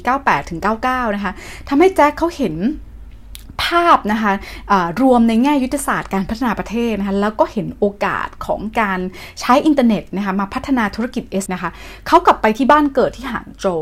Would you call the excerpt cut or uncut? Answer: cut